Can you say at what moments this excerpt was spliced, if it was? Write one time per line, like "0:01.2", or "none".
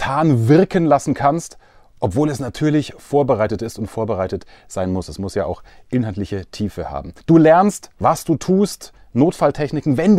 0:07.2